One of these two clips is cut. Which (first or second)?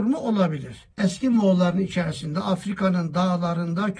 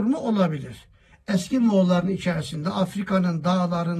first